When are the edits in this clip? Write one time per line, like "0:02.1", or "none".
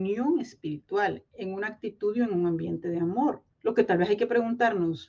0:03.5